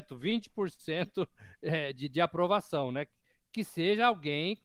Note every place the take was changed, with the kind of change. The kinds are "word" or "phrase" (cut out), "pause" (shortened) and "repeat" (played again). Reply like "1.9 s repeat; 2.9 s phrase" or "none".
none